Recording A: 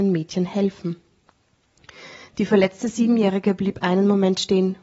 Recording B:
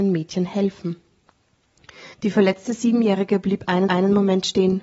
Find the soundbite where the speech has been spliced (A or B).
B